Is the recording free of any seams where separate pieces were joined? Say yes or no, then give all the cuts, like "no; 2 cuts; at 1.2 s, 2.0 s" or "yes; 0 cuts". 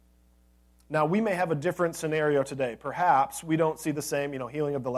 yes; 0 cuts